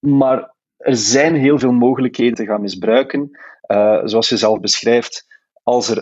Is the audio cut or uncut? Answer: cut